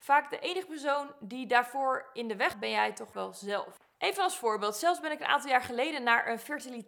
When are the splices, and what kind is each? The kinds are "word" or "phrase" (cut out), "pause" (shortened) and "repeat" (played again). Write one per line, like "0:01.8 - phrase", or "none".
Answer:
0:02.5 - word
0:03.1 - word